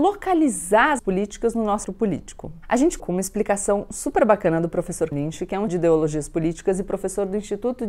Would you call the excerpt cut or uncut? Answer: cut